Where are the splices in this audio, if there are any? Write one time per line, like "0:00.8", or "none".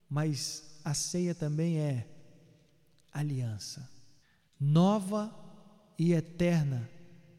0:04.2